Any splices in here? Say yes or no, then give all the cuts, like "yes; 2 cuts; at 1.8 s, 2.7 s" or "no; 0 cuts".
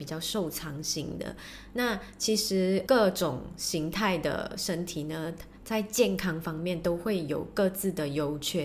yes; 1 cut; at 2.9 s